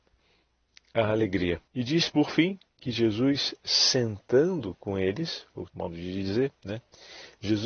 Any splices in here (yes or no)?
yes